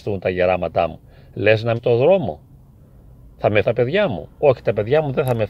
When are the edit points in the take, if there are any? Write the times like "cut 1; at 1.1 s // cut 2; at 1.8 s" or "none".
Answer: cut 1; at 1.8 s // cut 2; at 3.6 s